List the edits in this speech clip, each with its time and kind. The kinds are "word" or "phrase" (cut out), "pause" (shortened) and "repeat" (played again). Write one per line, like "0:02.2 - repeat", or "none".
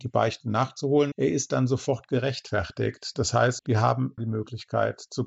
0:01.1 - word
0:03.6 - word
0:04.2 - word